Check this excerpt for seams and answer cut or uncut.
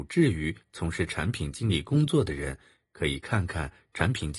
uncut